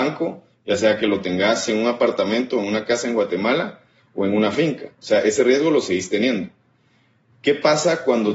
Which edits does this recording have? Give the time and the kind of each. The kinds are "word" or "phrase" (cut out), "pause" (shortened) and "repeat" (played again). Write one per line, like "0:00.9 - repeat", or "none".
none